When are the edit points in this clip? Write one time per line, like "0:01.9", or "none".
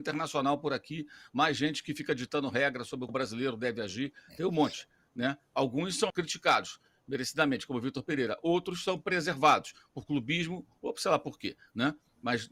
0:03.1
0:06.1